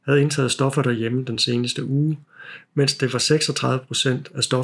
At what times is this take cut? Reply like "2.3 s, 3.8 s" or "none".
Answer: none